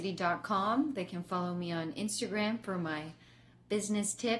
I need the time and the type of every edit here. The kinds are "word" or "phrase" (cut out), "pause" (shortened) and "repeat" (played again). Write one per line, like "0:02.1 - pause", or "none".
none